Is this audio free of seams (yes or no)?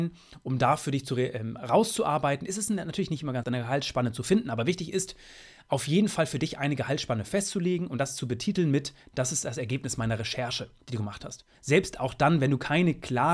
no